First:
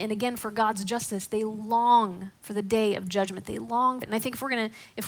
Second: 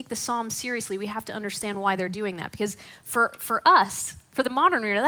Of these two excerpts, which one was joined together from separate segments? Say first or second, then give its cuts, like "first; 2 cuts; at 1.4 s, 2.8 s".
first; 2 cuts; at 2.4 s, 4.0 s